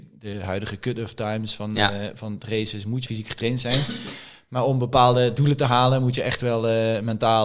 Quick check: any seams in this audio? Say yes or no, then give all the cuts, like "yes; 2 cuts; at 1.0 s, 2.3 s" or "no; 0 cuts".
yes; 1 cut; at 3.1 s